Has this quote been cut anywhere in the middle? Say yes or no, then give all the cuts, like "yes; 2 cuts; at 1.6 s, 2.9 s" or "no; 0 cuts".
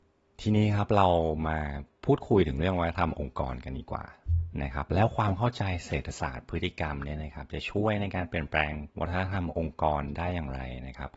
yes; 1 cut; at 8.9 s